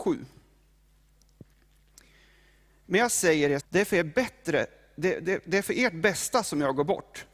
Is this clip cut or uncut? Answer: cut